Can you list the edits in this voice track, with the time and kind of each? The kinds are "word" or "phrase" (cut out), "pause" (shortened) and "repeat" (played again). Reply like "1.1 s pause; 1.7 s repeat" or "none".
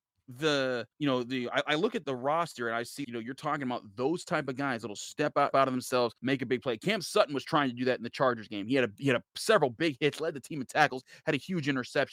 0.9 s pause; 2.0 s word; 3.0 s word; 5.5 s word; 6.2 s pause